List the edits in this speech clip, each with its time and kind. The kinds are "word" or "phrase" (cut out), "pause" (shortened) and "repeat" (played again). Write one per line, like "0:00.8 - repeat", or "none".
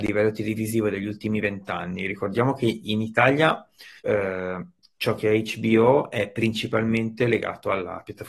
0:04.0 - pause